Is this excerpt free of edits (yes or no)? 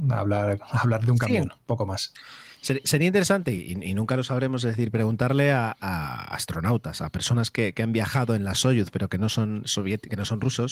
yes